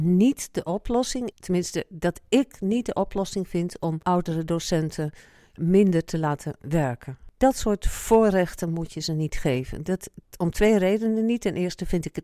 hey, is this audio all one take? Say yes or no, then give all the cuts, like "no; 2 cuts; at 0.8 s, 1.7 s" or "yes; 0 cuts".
no; 3 cuts; at 1.3 s, 4.0 s, 5.6 s